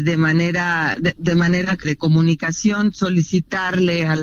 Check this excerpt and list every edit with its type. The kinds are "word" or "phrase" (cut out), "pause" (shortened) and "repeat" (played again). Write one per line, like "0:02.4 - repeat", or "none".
0:01.2 - word
0:01.8 - word